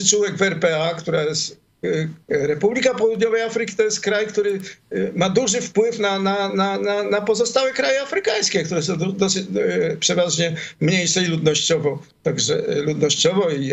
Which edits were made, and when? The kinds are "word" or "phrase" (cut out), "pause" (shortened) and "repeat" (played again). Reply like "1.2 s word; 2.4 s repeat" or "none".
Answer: 2.2 s pause